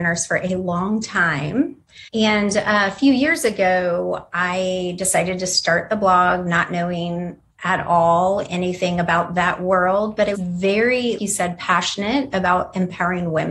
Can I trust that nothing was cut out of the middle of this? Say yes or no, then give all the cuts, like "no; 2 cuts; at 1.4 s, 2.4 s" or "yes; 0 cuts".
no; 3 cuts; at 2.1 s, 10.3 s, 11.2 s